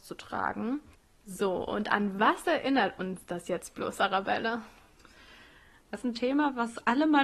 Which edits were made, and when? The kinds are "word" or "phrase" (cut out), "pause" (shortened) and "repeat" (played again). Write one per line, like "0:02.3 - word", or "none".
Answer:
0:06.0 - word